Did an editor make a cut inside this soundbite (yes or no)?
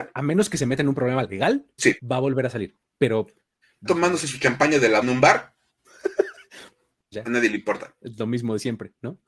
yes